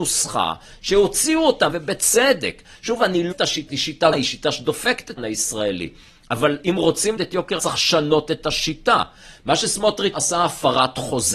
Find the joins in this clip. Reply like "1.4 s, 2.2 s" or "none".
1.7 s, 3.3 s, 3.7 s, 4.1 s, 5.2 s, 7.2 s, 7.6 s, 10.1 s

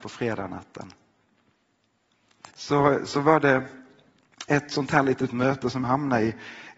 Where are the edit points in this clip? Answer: 2.5 s, 5.8 s

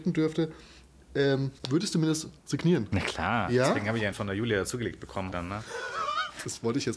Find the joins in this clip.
1.6 s, 2.4 s, 4.1 s, 5.3 s

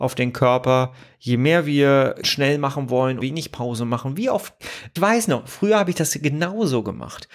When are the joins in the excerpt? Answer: 2.2 s, 3.2 s, 5.0 s

